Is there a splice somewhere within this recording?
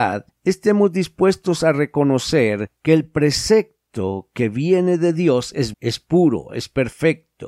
yes; 1 cut; at 5.7 s

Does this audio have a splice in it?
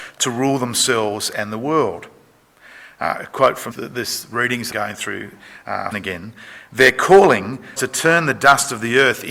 yes; 4 cuts; at 3.7 s, 4.7 s, 5.9 s, 7.8 s

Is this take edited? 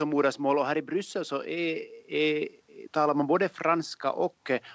no; 0 cuts

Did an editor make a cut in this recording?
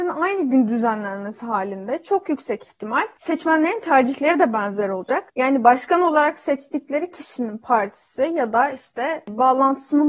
no; 0 cuts

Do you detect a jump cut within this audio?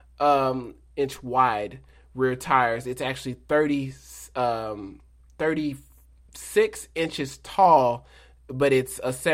no; 0 cuts

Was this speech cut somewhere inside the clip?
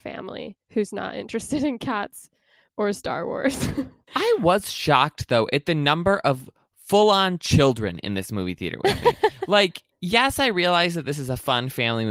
no; 0 cuts

